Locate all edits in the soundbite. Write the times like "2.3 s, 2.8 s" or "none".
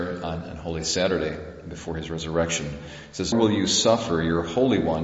3.3 s